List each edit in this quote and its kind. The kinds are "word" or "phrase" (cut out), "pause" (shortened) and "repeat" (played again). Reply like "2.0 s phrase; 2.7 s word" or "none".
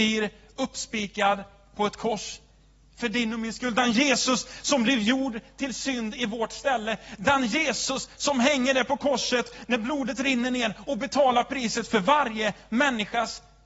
none